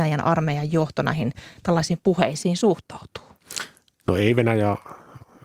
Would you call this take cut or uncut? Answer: uncut